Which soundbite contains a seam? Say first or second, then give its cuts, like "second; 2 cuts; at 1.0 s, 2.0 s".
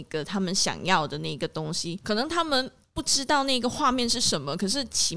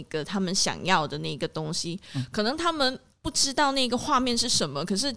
first; 1 cut; at 2.0 s